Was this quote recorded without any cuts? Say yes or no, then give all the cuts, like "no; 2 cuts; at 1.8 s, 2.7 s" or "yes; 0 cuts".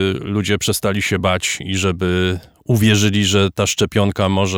yes; 0 cuts